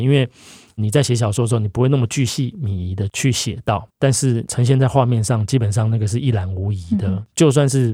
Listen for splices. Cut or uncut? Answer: cut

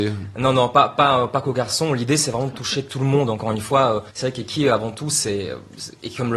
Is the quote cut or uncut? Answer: cut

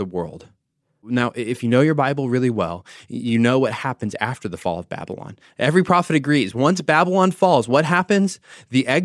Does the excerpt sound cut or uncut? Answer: uncut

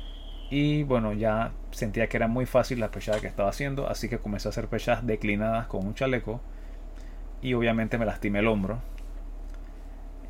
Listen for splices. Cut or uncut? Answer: uncut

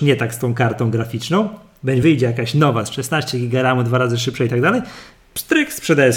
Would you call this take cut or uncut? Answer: uncut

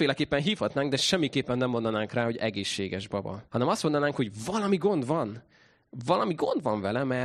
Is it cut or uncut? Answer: cut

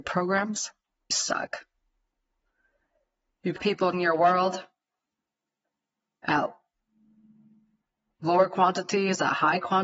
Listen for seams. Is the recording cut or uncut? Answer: cut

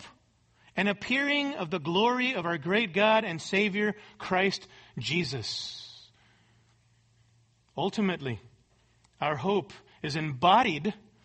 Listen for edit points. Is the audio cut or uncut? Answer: uncut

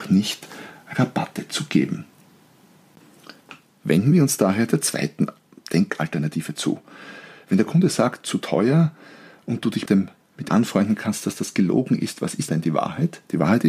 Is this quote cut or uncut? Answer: cut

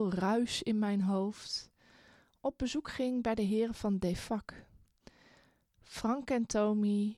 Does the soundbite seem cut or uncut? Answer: uncut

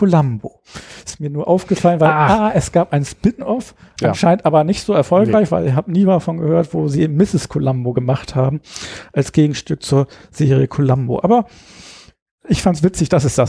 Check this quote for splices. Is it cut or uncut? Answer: uncut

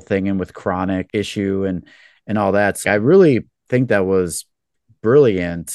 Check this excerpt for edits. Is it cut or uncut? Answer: uncut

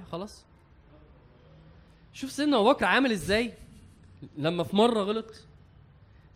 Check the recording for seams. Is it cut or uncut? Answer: uncut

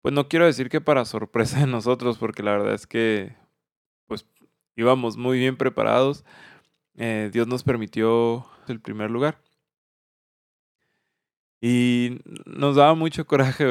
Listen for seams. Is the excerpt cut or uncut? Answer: cut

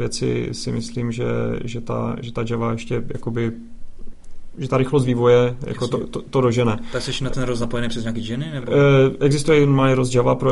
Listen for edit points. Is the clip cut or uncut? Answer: uncut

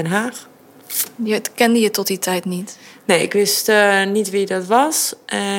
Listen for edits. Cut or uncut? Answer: uncut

